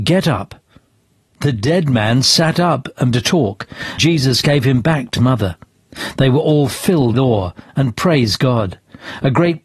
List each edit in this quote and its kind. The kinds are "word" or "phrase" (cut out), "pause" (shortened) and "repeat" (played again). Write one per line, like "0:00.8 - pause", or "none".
0:03.1 - word
0:04.0 - word
0:05.2 - word
0:07.1 - word